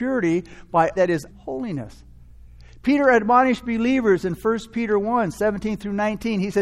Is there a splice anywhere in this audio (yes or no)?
yes